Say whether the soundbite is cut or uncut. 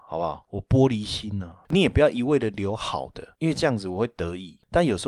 uncut